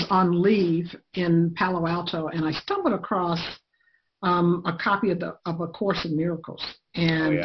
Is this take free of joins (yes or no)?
yes